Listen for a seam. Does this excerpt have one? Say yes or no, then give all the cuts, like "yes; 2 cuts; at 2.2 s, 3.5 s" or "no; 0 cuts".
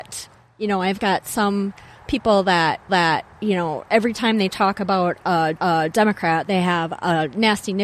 yes; 2 cuts; at 2.9 s, 5.6 s